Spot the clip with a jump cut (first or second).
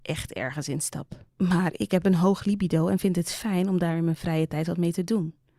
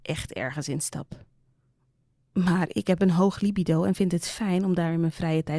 first